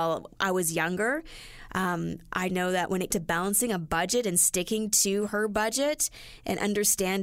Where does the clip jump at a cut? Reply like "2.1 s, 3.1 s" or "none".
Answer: 2.5 s, 3.1 s